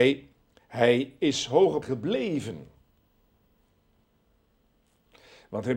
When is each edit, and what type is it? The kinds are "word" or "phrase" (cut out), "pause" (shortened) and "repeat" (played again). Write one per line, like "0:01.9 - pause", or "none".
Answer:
0:01.8 - word